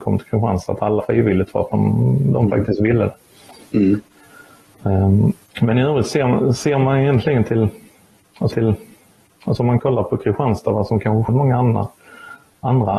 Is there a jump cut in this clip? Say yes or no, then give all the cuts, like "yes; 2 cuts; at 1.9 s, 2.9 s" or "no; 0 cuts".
yes; 5 cuts; at 1.0 s, 5.5 s, 8.5 s, 9.8 s, 11.3 s